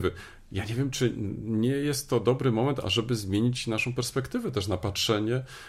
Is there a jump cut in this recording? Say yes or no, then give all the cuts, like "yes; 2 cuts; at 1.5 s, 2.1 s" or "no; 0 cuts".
no; 0 cuts